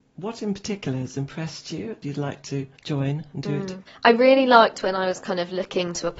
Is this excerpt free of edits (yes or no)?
no